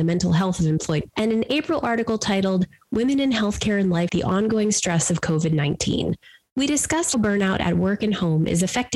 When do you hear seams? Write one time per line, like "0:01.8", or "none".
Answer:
0:01.1
0:04.1
0:07.1